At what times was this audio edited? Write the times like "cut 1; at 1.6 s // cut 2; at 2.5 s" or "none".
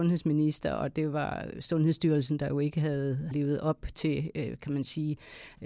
cut 1; at 3.3 s